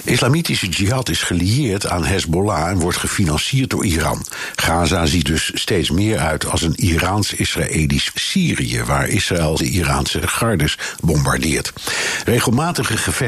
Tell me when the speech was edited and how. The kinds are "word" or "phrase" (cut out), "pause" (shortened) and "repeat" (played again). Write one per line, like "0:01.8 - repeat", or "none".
0:05.2 - word
0:08.1 - phrase
0:09.6 - phrase
0:10.2 - word